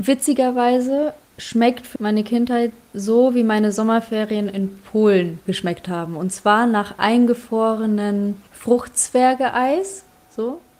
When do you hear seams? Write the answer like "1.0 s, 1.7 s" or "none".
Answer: 2.0 s, 5.5 s, 8.5 s